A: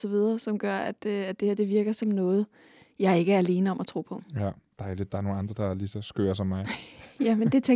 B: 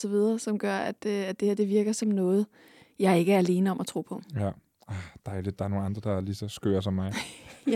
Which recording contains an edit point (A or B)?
A